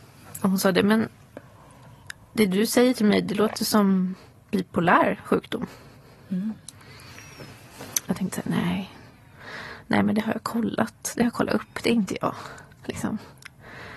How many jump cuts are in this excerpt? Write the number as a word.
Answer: zero